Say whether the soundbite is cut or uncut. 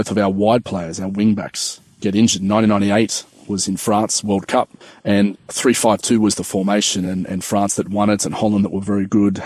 uncut